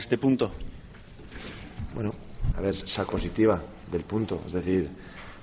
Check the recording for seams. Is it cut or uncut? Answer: cut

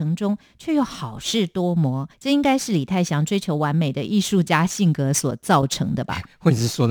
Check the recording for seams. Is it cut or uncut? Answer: cut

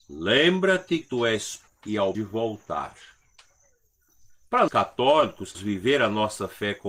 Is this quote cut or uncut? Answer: cut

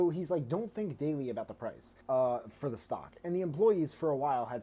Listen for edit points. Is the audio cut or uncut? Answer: cut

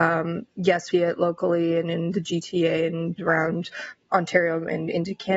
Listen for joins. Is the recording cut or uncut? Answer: cut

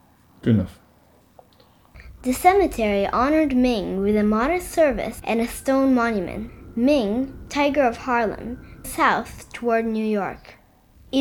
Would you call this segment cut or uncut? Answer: cut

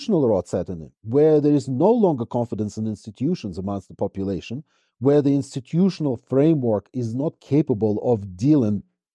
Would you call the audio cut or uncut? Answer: uncut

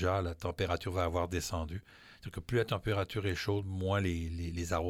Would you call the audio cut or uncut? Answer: uncut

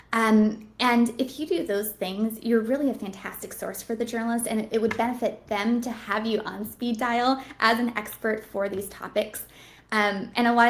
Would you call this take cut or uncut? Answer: uncut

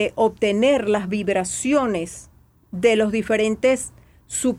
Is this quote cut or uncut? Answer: uncut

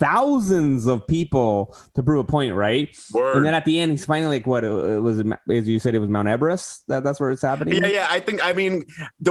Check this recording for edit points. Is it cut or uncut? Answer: uncut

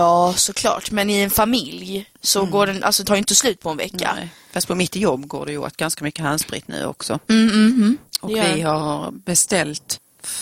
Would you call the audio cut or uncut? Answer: cut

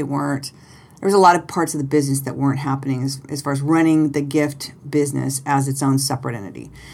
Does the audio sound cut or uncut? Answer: uncut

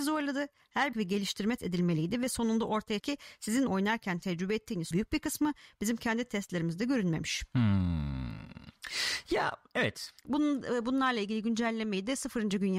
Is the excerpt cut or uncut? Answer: cut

